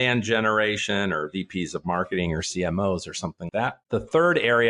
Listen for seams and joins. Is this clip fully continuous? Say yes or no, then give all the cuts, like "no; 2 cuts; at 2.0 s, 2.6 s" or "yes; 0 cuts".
no; 1 cut; at 3.5 s